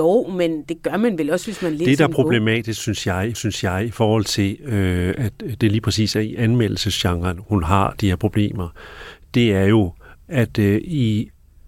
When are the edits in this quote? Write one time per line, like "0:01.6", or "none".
0:03.3